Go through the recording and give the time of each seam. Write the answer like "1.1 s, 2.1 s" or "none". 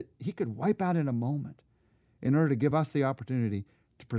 none